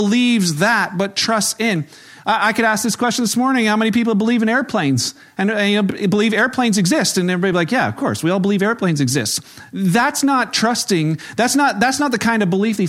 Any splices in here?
no; 0 cuts

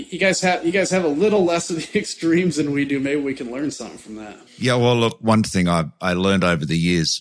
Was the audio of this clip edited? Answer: yes; 1 cut; at 4.5 s

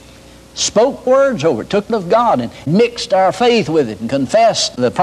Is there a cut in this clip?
yes; 2 cuts; at 1.1 s, 1.9 s

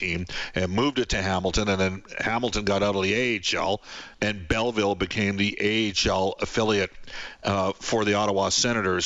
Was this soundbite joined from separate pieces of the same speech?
yes; 1 cut; at 4.1 s

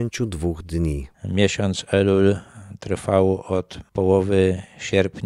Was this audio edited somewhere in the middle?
yes; 1 cut; at 1.1 s

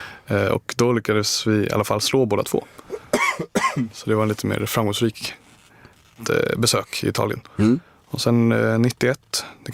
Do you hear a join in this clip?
no; 0 cuts

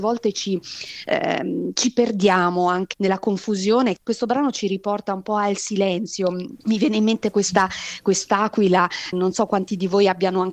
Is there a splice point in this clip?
yes; 4 cuts; at 2.9 s, 6.6 s, 7.3 s, 9.1 s

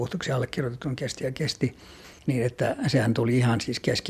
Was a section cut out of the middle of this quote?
no; 0 cuts

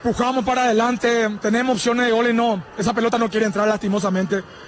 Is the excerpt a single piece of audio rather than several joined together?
yes; 0 cuts

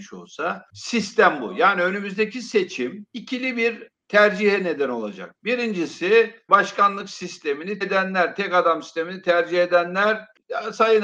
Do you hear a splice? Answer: yes; 2 cuts; at 6.5 s, 7.8 s

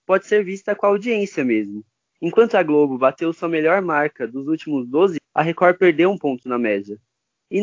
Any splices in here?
yes; 1 cut; at 5.2 s

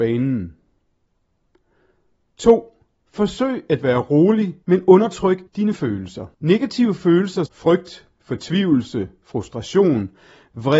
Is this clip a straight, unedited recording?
no; 4 cuts; at 4.6 s, 5.5 s, 6.3 s, 7.5 s

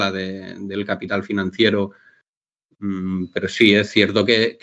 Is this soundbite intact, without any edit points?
yes; 0 cuts

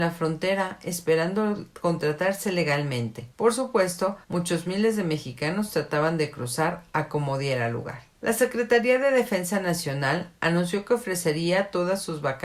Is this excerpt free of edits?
no; 3 cuts; at 3.3 s, 4.2 s, 8.2 s

